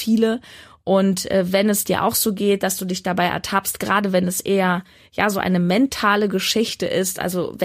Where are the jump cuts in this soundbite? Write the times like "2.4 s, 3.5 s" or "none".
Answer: none